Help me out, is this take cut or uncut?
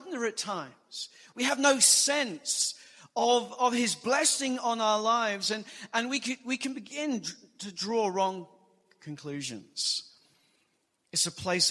uncut